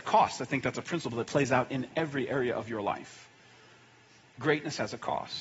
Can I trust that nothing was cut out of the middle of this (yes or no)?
yes